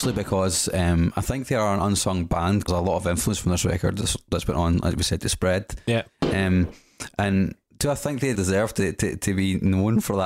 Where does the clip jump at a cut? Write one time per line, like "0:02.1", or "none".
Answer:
0:02.7
0:08.3